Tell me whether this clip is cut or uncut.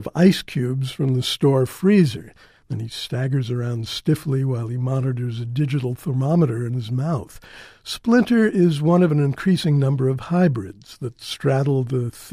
uncut